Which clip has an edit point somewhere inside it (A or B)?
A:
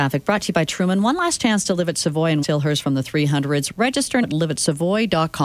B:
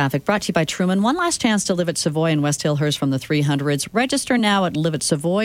A